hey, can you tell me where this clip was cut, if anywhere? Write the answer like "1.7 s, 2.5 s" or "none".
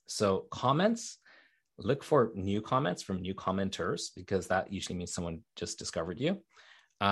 none